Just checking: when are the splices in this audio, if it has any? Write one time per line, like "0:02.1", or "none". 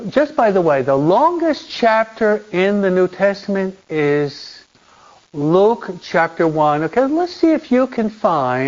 none